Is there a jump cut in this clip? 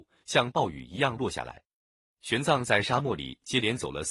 no; 0 cuts

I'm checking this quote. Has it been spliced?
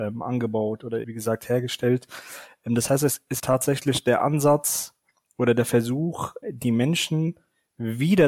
yes; 3 cuts; at 1.0 s, 3.4 s, 6.4 s

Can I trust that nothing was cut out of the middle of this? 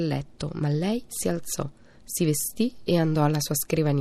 yes; 0 cuts

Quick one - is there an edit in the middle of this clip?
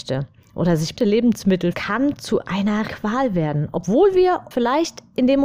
yes; 4 cuts; at 1.0 s, 1.7 s, 2.9 s, 4.5 s

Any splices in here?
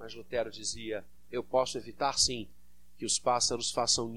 no; 0 cuts

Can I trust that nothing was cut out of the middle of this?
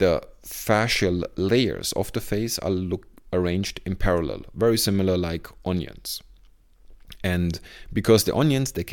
yes; 0 cuts

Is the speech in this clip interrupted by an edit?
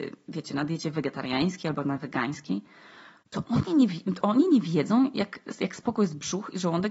no; 0 cuts

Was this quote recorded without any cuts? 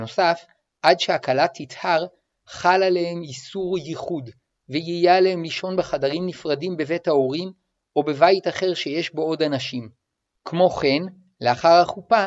yes; 0 cuts

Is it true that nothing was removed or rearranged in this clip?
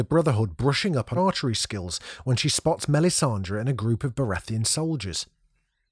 no; 1 cut; at 1.2 s

